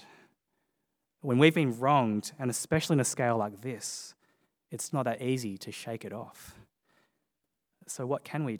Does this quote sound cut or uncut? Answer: cut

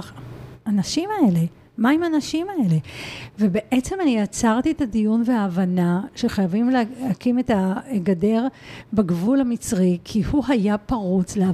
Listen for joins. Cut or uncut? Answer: uncut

